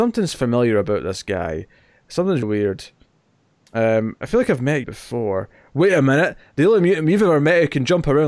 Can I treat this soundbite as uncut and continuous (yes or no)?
no